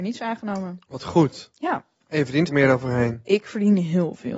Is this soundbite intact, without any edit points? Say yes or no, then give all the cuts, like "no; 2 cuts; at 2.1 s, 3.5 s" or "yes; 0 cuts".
no; 1 cut; at 2.5 s